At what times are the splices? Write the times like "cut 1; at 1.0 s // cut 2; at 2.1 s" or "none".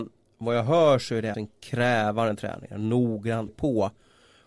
cut 1; at 1.3 s // cut 2; at 3.5 s